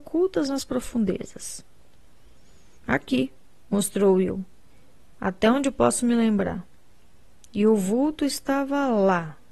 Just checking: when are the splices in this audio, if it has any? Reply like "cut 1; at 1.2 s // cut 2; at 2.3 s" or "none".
cut 1; at 2.8 s